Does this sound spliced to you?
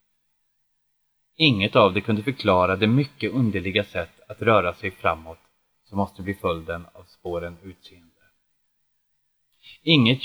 no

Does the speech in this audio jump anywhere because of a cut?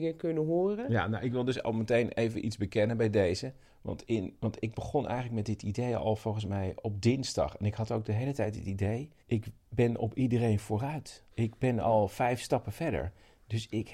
yes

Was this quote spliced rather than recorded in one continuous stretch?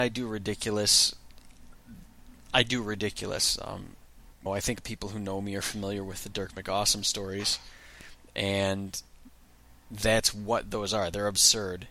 yes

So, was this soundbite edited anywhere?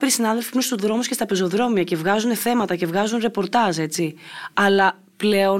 no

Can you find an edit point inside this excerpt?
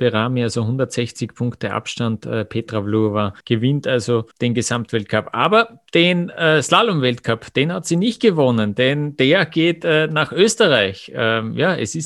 yes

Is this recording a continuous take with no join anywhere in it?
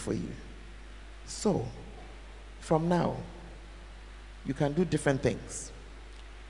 yes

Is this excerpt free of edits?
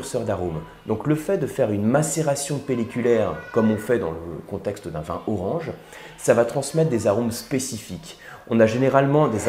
yes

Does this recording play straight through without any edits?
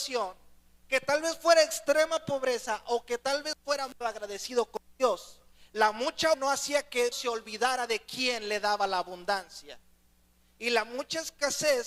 no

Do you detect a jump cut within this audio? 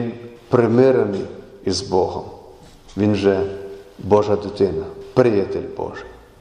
no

